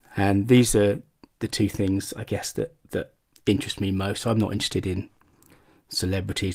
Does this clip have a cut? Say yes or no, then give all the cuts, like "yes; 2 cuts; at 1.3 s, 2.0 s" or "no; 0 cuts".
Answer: yes; 1 cut; at 1.3 s